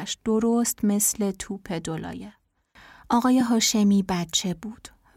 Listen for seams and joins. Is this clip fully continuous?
yes; 0 cuts

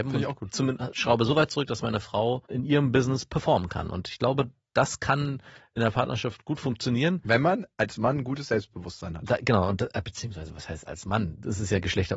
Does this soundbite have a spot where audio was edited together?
yes; 1 cut; at 2.5 s

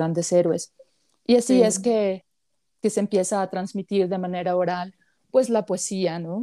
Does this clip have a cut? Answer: no; 0 cuts

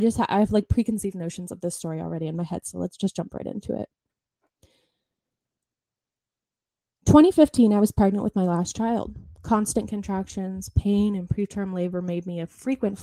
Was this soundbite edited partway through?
no; 0 cuts

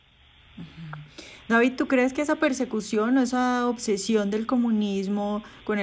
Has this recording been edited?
no; 0 cuts

